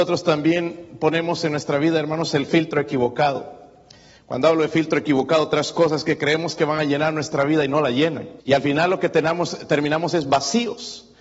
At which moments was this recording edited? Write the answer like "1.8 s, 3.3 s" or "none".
8.4 s